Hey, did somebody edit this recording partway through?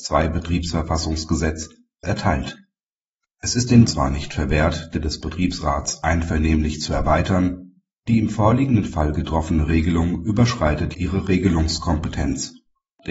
yes; 4 cuts; at 2.0 s, 3.8 s, 4.9 s, 10.9 s

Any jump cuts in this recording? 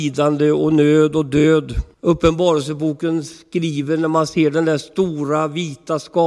yes; 1 cut; at 1.9 s

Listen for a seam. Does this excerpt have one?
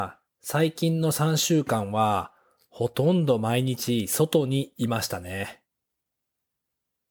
no; 0 cuts

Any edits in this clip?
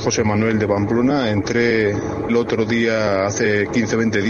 yes; 1 cut; at 2.3 s

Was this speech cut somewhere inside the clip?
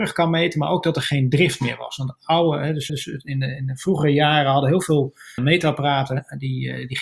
yes; 2 cuts; at 2.9 s, 5.4 s

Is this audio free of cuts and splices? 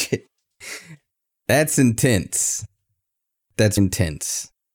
no; 1 cut; at 3.8 s

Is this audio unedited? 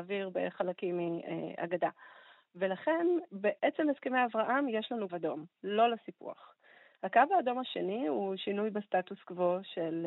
no; 1 cut; at 5.1 s

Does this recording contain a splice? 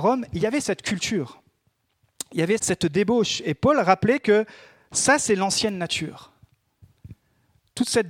yes; 1 cut; at 2.6 s

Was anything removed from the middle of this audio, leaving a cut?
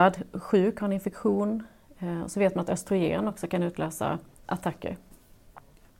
no; 0 cuts

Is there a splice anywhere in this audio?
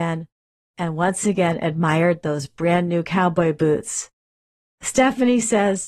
no; 0 cuts

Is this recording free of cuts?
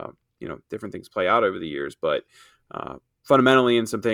yes; 0 cuts

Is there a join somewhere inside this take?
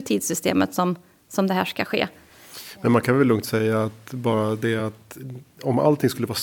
no; 0 cuts

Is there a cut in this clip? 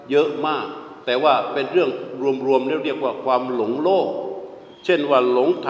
yes; 2 cuts; at 1.0 s, 4.7 s

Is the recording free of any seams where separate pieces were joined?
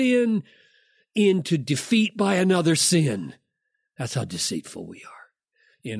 yes; 0 cuts

